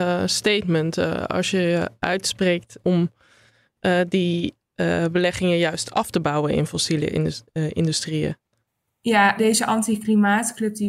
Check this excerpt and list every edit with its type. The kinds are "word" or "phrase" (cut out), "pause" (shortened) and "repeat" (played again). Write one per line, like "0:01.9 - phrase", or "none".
0:09.4 - word

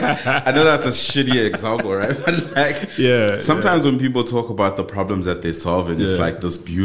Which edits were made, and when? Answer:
none

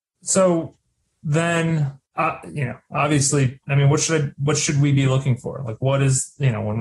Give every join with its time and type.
0:02.1 - pause
0:03.6 - phrase

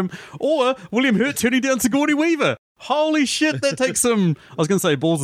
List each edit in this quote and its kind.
none

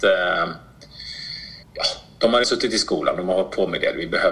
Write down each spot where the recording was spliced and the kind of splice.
0:01.6 - pause
0:02.4 - word

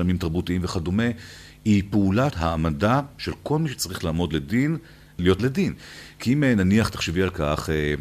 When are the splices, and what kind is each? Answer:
0:02.3 - phrase
0:05.4 - word

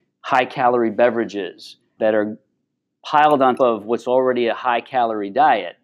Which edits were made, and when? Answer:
0:02.0 - word
0:03.6 - word

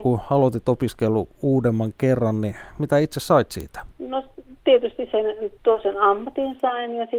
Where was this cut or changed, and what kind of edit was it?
0:03.9 - pause
0:05.6 - pause

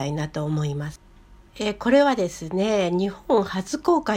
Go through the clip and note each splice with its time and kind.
none

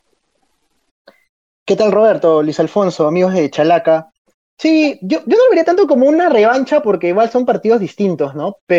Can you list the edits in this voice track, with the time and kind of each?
none

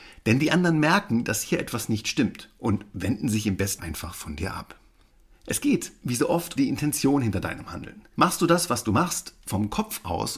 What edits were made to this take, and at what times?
0:03.8 - word
0:05.1 - pause
0:06.6 - word
0:08.1 - pause

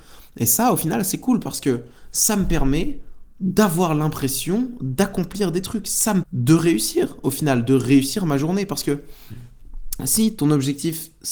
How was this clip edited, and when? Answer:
0:06.2 - word

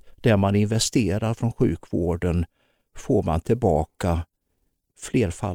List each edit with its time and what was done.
none

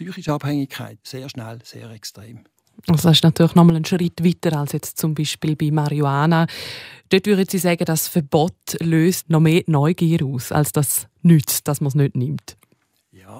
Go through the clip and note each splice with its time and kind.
0:01.0 - word
0:09.2 - word

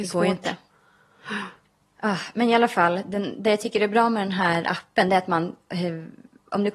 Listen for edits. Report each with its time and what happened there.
none

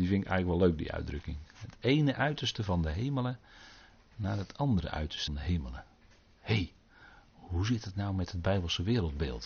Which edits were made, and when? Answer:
0:05.3 - word

